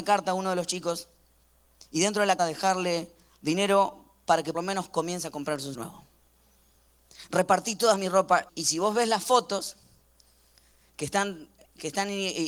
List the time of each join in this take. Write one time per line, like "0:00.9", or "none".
0:02.4
0:04.5
0:05.7
0:08.5